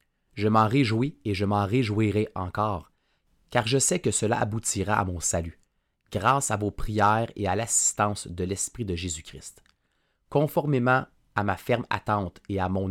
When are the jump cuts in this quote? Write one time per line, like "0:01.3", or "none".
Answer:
none